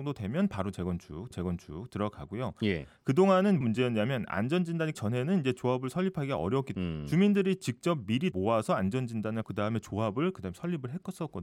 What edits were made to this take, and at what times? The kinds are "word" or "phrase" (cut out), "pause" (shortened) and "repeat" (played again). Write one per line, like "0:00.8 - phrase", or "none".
0:01.3 - repeat
0:03.6 - word
0:04.9 - word
0:06.7 - word
0:08.3 - word
0:09.4 - word